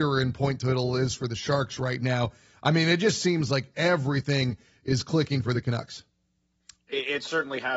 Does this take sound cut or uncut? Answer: uncut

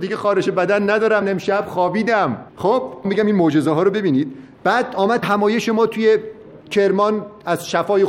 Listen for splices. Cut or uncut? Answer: cut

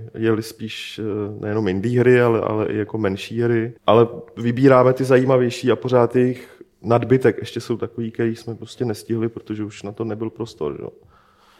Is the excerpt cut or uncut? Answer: cut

